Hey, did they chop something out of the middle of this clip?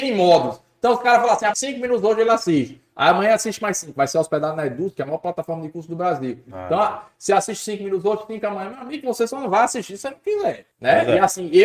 yes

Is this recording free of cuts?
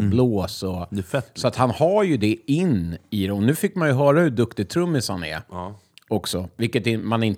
yes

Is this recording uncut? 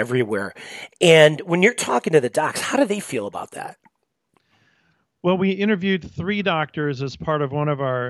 yes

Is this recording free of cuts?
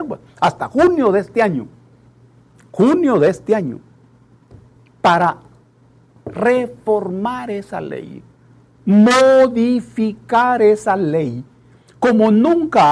yes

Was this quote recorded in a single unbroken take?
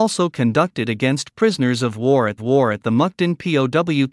no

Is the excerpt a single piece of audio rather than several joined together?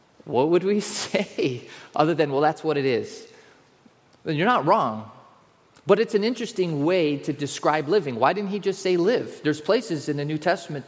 yes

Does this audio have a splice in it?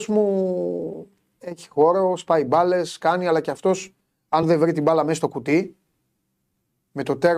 no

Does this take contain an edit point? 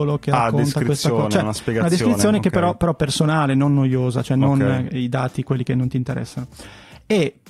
no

